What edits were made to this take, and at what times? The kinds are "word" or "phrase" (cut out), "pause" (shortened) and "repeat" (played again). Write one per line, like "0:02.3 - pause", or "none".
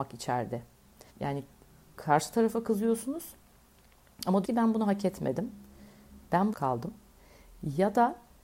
0:01.1 - pause
0:04.4 - word
0:06.5 - phrase